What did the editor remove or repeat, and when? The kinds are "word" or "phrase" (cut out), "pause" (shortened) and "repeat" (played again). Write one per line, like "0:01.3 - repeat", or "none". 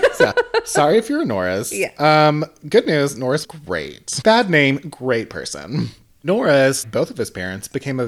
0:03.4 - word
0:06.8 - word